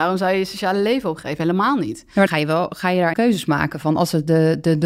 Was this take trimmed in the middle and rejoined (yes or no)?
yes